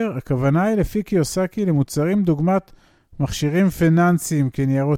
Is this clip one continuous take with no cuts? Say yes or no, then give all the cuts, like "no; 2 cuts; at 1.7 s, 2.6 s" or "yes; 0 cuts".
yes; 0 cuts